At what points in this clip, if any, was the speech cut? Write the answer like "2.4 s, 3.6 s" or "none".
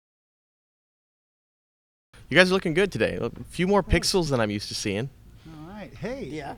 none